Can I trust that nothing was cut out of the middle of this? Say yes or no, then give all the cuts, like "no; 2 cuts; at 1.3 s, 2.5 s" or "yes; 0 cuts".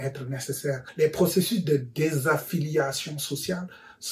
yes; 0 cuts